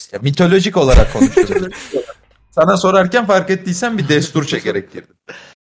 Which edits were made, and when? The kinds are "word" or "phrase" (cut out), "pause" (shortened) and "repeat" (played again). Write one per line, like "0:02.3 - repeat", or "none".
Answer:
none